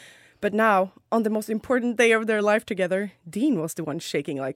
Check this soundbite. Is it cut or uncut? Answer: uncut